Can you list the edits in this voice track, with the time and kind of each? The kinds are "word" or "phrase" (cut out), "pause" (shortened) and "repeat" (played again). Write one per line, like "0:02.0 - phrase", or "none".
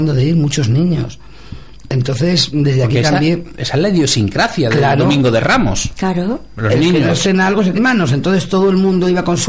0:07.8 - word